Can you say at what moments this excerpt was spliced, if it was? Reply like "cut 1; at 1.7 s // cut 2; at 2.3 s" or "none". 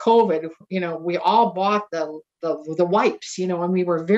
none